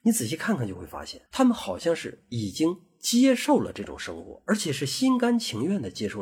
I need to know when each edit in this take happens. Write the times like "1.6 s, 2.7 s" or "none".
1.3 s